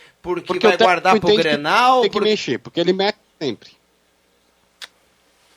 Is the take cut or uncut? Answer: uncut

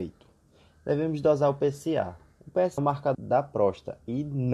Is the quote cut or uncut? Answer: cut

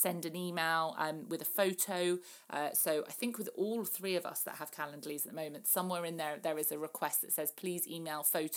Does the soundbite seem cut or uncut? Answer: uncut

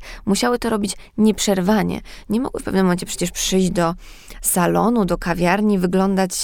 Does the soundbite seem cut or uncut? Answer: uncut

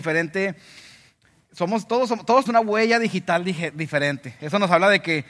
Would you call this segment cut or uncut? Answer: cut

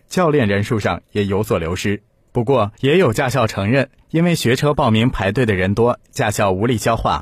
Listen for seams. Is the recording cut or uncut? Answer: uncut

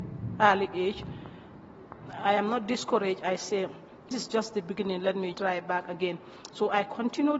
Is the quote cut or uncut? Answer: cut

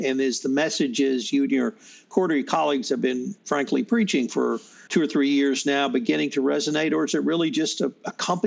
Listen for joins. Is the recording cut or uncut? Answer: cut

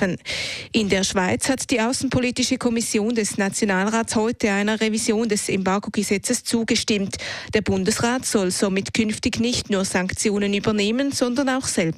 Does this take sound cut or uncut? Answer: uncut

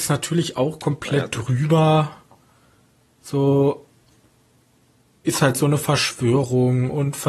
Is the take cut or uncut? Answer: uncut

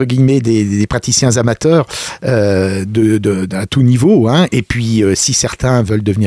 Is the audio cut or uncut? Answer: uncut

